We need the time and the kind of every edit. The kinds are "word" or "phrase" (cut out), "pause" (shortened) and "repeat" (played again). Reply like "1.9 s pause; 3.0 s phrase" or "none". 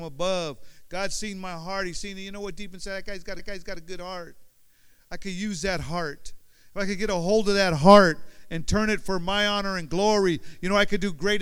3.4 s repeat